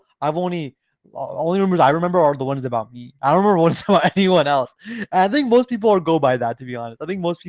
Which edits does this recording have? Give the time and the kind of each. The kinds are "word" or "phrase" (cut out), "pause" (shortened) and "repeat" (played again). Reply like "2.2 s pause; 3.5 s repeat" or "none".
none